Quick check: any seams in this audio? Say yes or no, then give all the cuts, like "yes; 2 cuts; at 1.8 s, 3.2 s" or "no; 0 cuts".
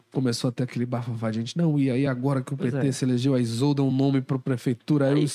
no; 0 cuts